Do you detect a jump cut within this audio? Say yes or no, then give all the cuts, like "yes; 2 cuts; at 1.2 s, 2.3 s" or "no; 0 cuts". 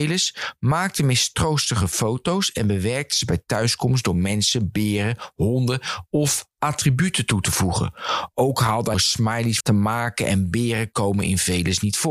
yes; 2 cuts; at 8.9 s, 9.6 s